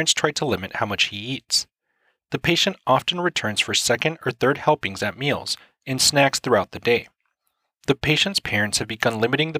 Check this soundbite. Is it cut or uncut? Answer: uncut